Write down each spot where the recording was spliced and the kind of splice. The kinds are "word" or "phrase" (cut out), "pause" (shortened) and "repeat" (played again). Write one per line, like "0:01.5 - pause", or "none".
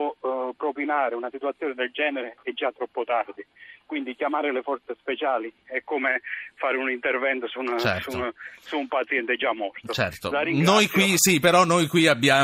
none